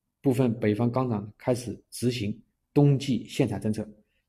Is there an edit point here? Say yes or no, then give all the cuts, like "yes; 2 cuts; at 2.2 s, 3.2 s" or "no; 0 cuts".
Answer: yes; 1 cut; at 2.5 s